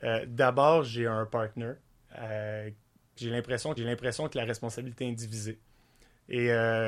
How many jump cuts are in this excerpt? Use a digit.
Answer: 2